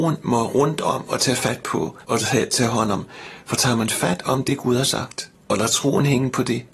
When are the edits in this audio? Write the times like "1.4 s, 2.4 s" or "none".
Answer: 2.0 s, 5.3 s